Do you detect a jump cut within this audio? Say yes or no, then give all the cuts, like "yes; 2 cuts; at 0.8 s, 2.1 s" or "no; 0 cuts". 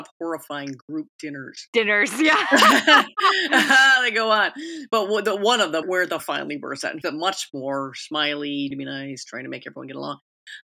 yes; 4 cuts; at 5.8 s, 6.2 s, 7.0 s, 8.7 s